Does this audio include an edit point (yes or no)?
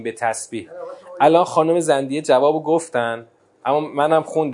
no